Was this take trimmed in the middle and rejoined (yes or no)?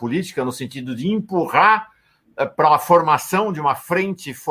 no